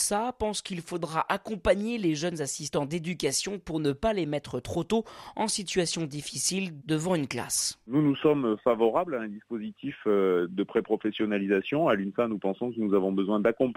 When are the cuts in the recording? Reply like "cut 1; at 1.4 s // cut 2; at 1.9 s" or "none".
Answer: none